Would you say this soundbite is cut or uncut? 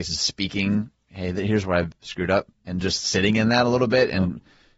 uncut